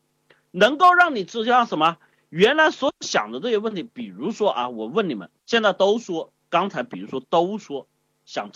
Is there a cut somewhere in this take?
yes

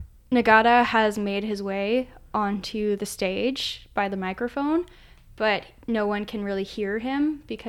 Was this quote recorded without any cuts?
yes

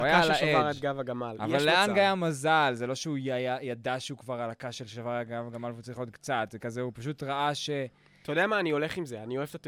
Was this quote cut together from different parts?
no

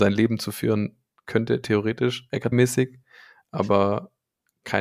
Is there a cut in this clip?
yes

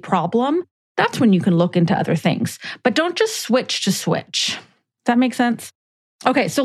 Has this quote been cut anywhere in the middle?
no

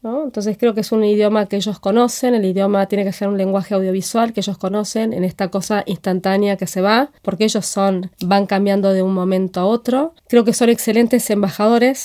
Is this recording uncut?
no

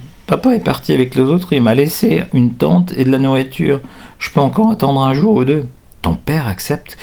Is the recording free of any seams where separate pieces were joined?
yes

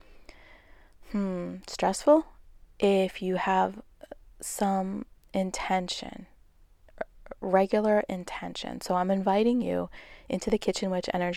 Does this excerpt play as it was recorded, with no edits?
yes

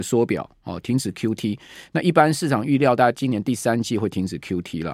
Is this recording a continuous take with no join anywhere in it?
yes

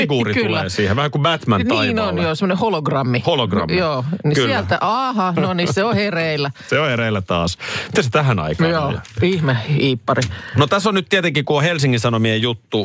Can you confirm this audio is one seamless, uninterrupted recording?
yes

